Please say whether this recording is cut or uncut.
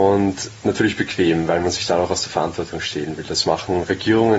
uncut